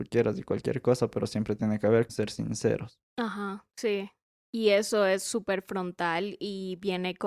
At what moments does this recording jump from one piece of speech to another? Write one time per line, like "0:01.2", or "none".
0:02.1

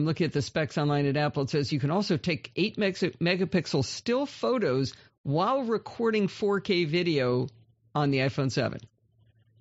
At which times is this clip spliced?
none

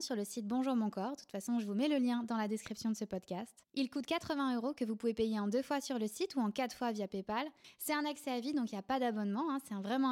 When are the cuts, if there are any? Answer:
0:03.6

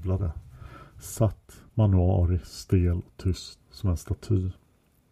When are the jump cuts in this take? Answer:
0:01.7
0:03.6

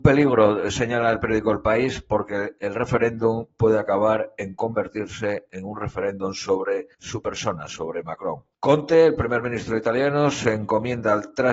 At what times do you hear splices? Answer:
0:06.9
0:08.5

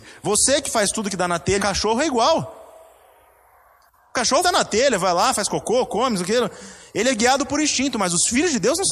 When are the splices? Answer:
0:01.6
0:04.4

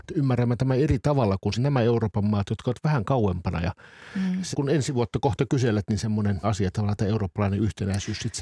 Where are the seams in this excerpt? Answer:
0:01.6
0:04.5
0:06.4
0:06.7

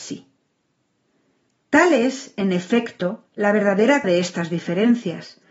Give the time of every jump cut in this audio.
0:03.3
0:04.0

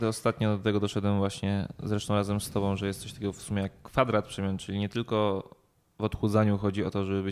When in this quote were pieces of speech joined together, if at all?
none

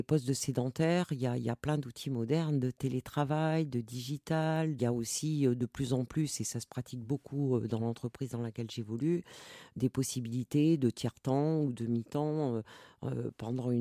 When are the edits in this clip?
none

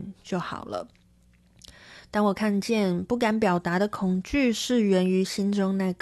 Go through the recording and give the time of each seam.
none

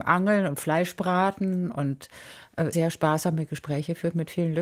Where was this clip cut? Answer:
0:02.7

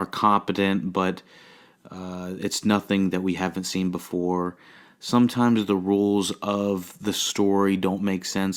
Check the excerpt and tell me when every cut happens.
none

